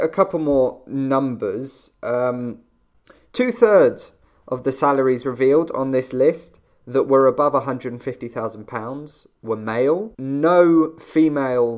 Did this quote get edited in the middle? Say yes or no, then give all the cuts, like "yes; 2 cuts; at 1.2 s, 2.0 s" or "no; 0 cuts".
yes; 1 cut; at 10.1 s